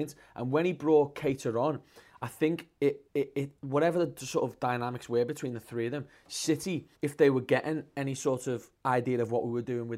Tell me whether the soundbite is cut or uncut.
cut